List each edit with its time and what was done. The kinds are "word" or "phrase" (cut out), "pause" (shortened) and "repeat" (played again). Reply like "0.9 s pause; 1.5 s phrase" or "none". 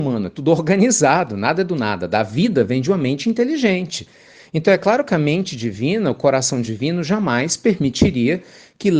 none